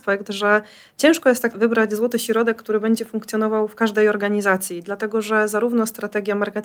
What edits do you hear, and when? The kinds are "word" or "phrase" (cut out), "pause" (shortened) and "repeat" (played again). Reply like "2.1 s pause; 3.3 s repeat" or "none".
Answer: 1.5 s word